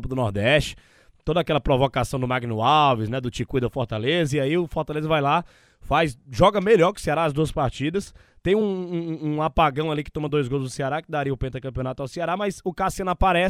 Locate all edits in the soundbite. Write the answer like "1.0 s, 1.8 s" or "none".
none